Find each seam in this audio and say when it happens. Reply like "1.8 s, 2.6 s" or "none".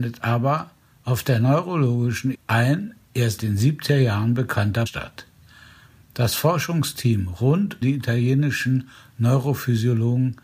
2.3 s, 3.4 s, 4.9 s, 7.8 s